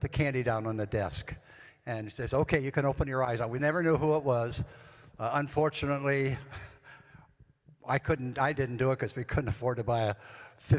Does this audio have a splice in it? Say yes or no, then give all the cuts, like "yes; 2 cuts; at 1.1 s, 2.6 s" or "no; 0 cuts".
no; 0 cuts